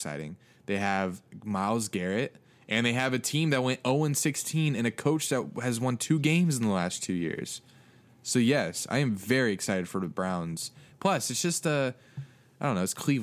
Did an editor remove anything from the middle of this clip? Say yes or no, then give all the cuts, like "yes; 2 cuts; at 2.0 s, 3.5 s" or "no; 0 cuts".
no; 0 cuts